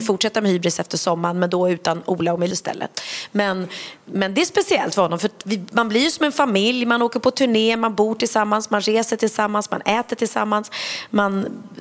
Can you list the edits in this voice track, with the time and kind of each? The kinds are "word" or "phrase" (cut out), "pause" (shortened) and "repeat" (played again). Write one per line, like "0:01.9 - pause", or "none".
0:02.5 - word